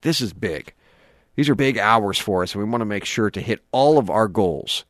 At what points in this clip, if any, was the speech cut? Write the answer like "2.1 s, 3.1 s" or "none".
1.6 s

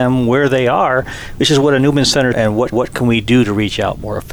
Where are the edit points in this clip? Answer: 2.3 s, 2.7 s

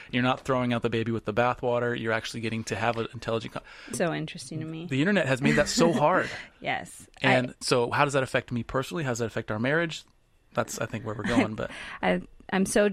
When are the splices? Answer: 3.9 s, 6.5 s, 7.6 s

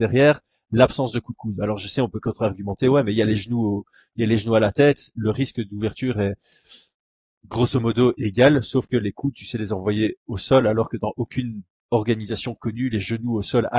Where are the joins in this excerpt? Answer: none

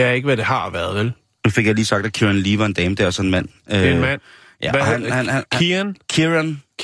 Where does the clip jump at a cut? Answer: none

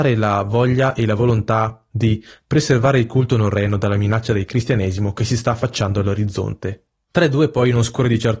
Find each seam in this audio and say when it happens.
none

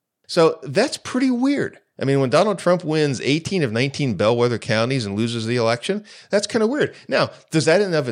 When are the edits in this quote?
none

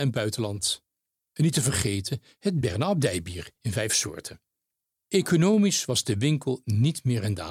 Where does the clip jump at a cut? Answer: none

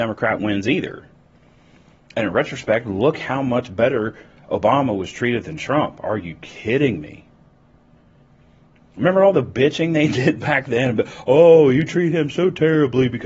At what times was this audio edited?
none

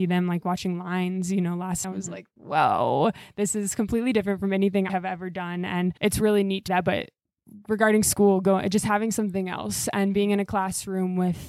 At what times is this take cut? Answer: 1.8 s, 2.4 s, 4.9 s, 6.0 s, 6.7 s

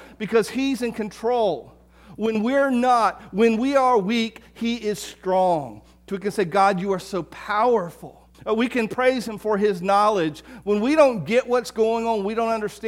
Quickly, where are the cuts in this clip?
8.3 s

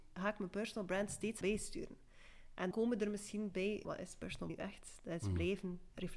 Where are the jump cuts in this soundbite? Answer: 1.4 s, 2.7 s, 3.5 s, 3.8 s, 4.5 s

